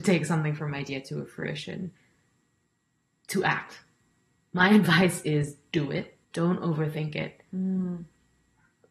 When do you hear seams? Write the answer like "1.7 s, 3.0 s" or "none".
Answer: 6.2 s